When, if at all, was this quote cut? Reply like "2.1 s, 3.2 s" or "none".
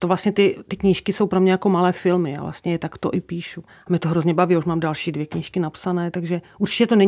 3.7 s